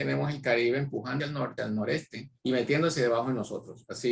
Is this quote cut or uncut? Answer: cut